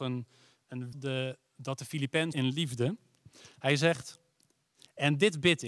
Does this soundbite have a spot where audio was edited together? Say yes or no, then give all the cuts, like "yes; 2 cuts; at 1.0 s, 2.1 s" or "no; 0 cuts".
yes; 2 cuts; at 0.9 s, 2.3 s